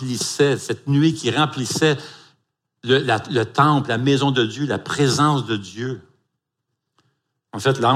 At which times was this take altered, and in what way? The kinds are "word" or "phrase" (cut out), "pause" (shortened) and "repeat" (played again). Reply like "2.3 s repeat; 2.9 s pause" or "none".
none